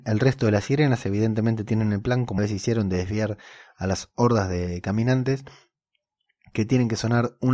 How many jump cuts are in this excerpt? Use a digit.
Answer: 1